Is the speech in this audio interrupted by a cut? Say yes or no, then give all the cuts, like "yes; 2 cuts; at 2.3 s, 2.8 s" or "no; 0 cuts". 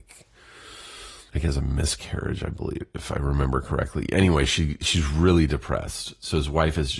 yes; 1 cut; at 1.3 s